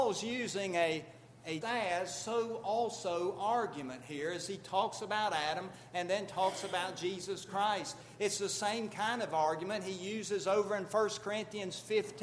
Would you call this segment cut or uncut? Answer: cut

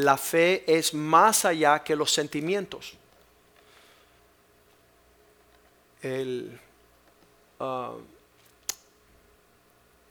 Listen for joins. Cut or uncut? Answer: uncut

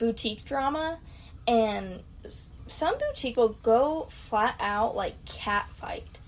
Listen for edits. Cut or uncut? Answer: cut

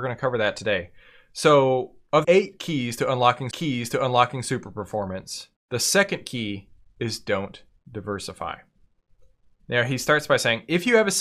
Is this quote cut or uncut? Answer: cut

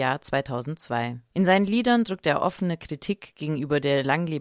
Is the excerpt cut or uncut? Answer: uncut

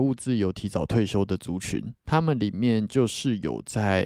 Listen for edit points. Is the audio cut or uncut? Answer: cut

